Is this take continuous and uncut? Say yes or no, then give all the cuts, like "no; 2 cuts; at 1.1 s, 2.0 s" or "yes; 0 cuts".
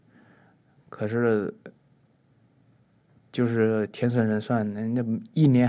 yes; 0 cuts